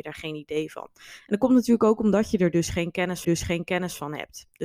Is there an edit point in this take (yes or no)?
yes